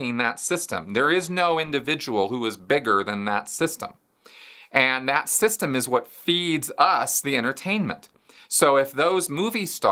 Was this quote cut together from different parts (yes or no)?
no